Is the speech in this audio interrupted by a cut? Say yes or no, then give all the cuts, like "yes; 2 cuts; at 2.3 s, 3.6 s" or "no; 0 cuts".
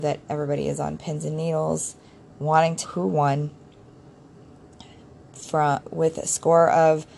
yes; 2 cuts; at 2.8 s, 5.8 s